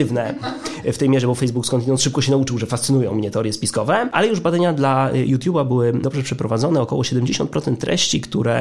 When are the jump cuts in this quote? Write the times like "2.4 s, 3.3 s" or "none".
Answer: none